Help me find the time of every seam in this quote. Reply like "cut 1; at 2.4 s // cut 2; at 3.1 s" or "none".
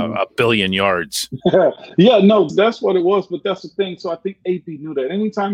cut 1; at 2.5 s